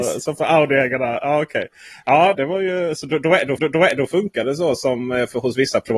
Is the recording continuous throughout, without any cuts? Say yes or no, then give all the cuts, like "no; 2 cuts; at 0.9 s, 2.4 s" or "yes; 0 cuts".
no; 2 cuts; at 2.3 s, 3.6 s